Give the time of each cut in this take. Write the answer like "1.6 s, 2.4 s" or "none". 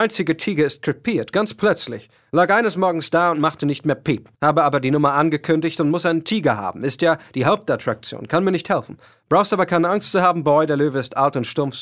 4.3 s